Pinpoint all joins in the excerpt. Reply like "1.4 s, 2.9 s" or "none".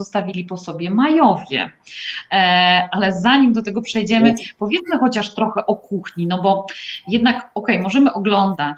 none